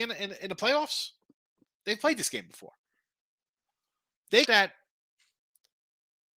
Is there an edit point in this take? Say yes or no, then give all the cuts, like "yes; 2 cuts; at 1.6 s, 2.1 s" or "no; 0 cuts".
yes; 1 cut; at 4.5 s